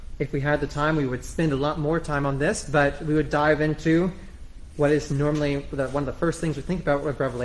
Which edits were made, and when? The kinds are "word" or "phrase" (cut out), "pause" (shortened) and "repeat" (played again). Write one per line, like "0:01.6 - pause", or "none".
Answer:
none